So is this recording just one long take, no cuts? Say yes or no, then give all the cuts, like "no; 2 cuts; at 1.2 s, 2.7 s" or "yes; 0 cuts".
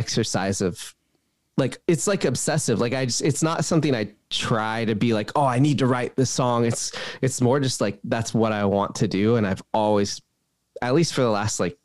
yes; 0 cuts